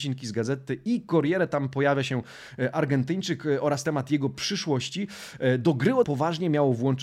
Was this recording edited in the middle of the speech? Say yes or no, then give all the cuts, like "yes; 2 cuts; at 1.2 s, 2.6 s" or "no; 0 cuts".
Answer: yes; 1 cut; at 6.0 s